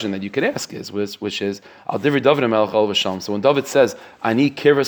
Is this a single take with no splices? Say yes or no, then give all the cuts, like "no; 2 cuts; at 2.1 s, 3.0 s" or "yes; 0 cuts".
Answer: yes; 0 cuts